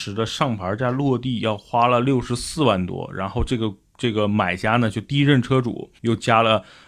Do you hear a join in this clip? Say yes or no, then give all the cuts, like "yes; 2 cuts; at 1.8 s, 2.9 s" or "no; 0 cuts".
yes; 1 cut; at 6.0 s